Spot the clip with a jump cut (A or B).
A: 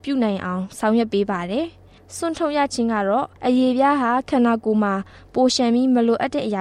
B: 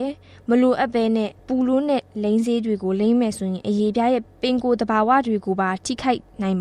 B